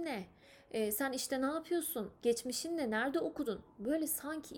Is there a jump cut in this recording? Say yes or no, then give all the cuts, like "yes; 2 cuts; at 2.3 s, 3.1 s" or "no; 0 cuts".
no; 0 cuts